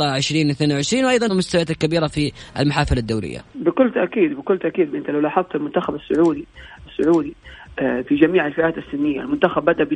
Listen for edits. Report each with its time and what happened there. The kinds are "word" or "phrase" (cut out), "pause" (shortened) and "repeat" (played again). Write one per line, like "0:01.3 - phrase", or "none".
0:01.3 - word
0:03.5 - pause
0:04.9 - word
0:06.9 - repeat